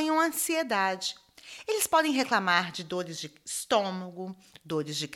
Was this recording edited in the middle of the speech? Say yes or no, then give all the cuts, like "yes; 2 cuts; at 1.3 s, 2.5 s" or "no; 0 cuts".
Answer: no; 0 cuts